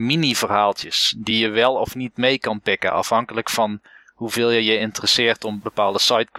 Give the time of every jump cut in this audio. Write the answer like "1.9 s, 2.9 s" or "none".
none

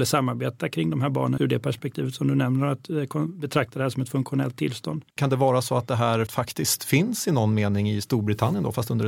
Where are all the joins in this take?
1.4 s, 5.1 s, 6.3 s

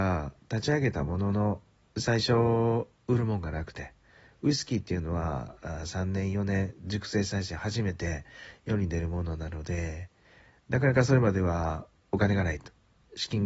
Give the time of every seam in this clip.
none

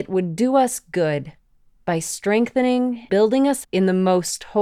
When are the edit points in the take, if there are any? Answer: 3.1 s, 3.6 s

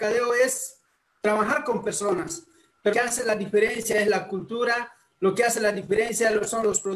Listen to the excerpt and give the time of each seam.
2.9 s

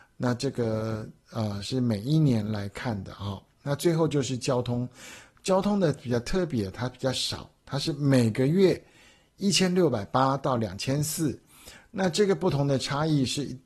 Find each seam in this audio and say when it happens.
none

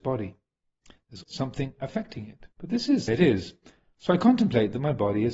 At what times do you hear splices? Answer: 1.2 s, 2.5 s, 3.1 s

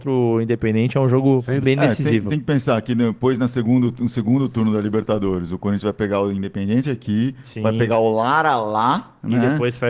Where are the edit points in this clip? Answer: 1.6 s

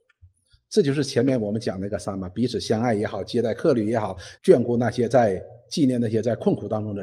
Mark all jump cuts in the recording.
4.3 s

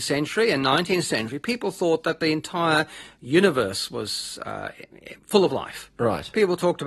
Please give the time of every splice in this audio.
5.2 s

